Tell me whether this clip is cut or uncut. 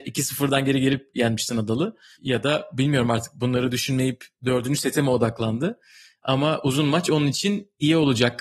uncut